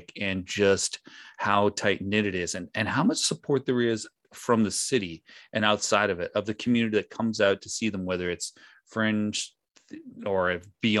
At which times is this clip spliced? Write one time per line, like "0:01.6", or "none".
none

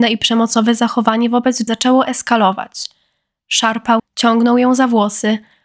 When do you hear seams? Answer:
0:01.7
0:04.0

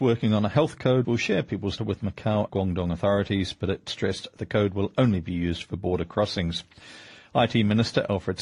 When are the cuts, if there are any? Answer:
0:01.0
0:01.8
0:02.5

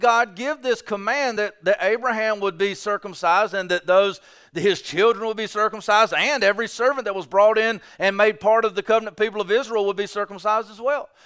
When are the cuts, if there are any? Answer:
none

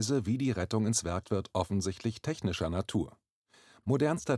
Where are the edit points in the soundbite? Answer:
0:01.2

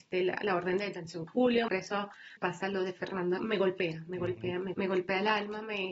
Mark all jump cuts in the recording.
0:01.3
0:01.7
0:02.4
0:03.4
0:04.7

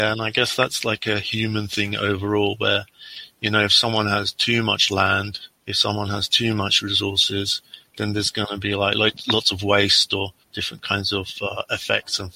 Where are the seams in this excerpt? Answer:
0:05.5
0:10.4

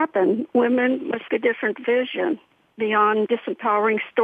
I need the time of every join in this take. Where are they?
0:01.3
0:03.3

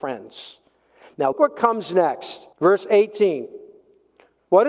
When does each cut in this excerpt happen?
0:01.3
0:02.5

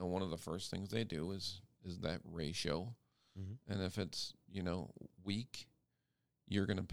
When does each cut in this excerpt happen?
none

